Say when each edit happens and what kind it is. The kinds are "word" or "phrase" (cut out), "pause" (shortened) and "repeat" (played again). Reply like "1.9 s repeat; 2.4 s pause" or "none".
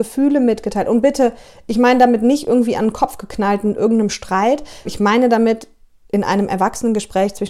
4.8 s word